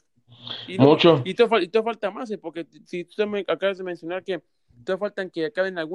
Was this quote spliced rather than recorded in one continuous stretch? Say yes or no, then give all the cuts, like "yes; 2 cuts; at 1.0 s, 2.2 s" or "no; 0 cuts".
no; 0 cuts